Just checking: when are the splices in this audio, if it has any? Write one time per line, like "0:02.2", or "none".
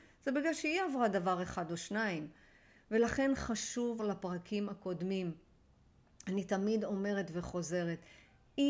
0:04.0